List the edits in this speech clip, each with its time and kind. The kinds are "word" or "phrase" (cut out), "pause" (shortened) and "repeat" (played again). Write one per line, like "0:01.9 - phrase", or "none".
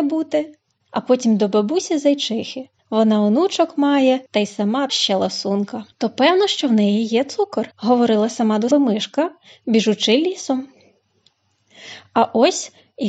0:02.8 - pause
0:04.3 - pause
0:04.9 - word
0:05.9 - pause
0:07.7 - pause
0:08.7 - word

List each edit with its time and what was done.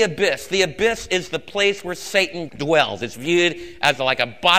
none

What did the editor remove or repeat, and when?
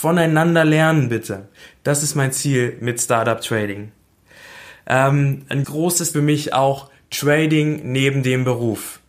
0:05.6 - word
0:06.1 - phrase

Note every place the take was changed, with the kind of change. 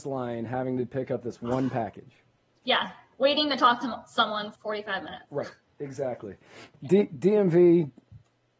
0:04.6 - word

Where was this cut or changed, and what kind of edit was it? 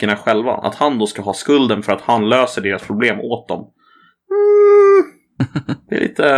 none

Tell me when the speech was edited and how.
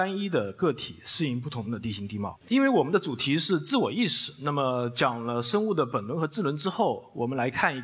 0:02.4 - pause

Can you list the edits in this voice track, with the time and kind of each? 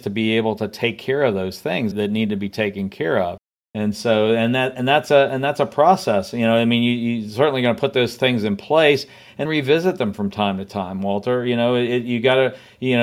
0:01.9 - word
0:09.5 - word

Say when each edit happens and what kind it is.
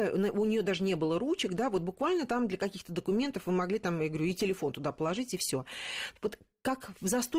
none

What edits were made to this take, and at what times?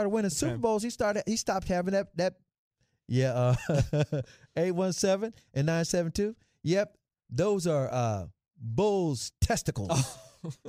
none

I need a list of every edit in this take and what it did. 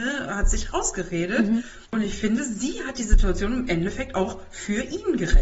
0:01.9 - pause

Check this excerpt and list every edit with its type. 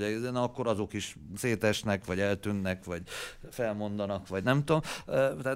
none

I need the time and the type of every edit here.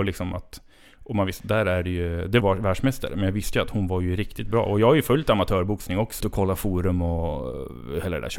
0:02.4 - phrase
0:06.2 - phrase

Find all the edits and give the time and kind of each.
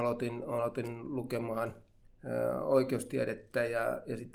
0:02.0 - pause

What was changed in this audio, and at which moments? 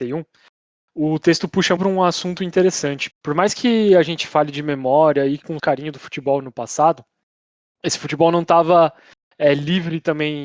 0:01.8 - word
0:03.1 - word
0:05.6 - word

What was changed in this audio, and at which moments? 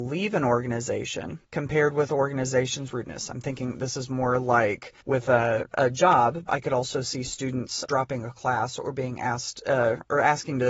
0:01.4 - pause
0:02.9 - phrase
0:05.0 - pause
0:06.5 - word
0:07.9 - word

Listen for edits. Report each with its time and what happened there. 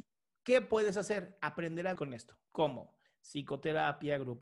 0:02.0 - word

